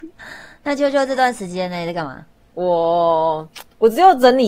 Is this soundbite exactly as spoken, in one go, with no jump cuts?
no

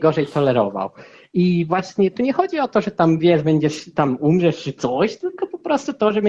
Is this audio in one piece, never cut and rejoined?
yes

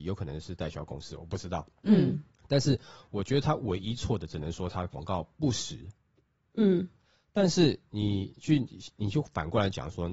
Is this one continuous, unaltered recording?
yes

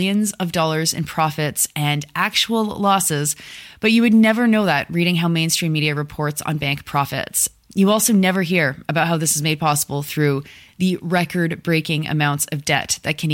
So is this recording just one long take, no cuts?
yes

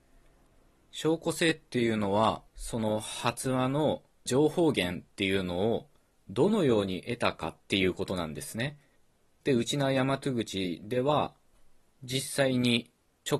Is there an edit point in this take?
yes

